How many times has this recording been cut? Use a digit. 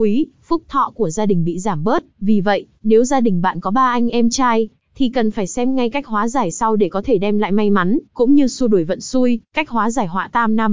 3